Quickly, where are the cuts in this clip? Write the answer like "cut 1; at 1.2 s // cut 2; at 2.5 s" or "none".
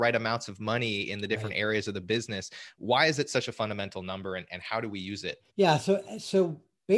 cut 1; at 5.5 s